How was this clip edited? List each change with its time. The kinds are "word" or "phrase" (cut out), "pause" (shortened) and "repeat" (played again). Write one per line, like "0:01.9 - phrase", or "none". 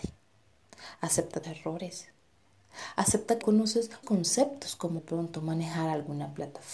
0:01.4 - word
0:03.4 - word
0:04.0 - word
0:05.0 - word